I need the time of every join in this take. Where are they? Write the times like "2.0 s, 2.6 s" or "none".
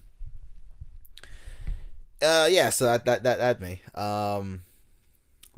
3.6 s